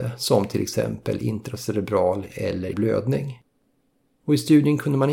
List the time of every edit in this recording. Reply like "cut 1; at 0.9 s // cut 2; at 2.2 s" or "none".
cut 1; at 2.3 s // cut 2; at 2.7 s